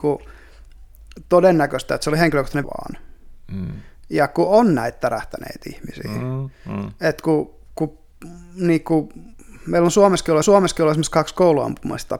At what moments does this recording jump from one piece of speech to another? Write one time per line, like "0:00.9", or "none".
0:02.6
0:10.4